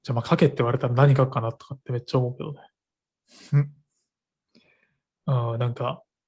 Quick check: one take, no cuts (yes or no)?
yes